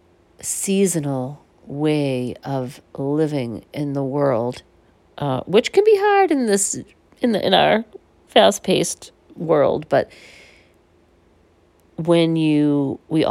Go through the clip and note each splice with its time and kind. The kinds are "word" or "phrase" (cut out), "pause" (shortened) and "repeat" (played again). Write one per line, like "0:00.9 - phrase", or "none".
0:01.5 - pause